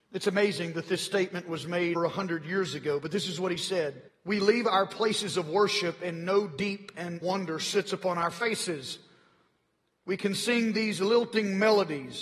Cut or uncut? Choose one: cut